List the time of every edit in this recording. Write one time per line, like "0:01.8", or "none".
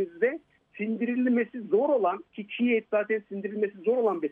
none

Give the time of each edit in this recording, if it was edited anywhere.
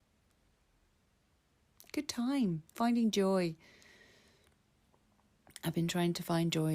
0:01.9
0:02.8

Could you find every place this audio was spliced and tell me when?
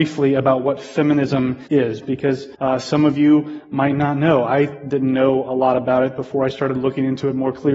0:01.7
0:02.5

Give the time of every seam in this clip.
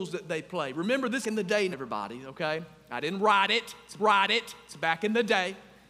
0:01.2
0:01.7
0:04.0

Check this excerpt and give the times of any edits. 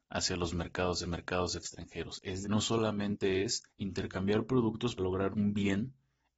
0:01.0
0:02.4
0:03.7
0:05.0
0:05.3

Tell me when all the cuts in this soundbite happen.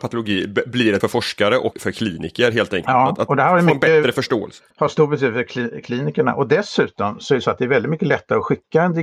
0:01.0
0:01.7
0:04.7

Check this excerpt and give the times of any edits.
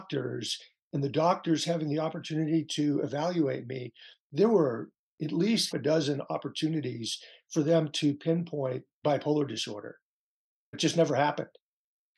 0:05.7
0:10.7

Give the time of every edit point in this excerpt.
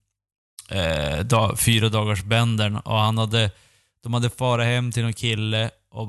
none

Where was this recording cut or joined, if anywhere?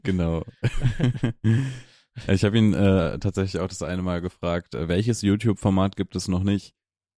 none

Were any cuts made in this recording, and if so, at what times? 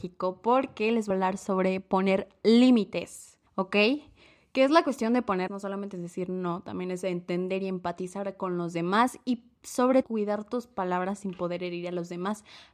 0:01.1
0:03.5
0:05.5
0:10.0

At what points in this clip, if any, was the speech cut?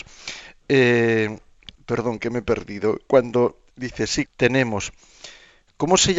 0:01.7
0:03.7
0:04.2

